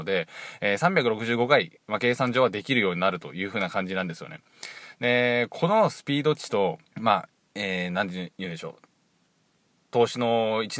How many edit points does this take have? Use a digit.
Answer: 1